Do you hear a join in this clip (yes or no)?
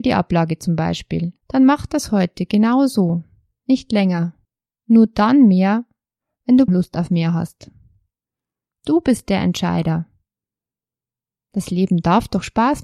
yes